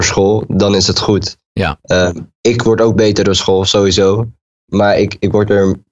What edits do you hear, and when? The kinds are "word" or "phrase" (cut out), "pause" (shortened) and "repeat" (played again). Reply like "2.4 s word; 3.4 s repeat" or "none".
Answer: none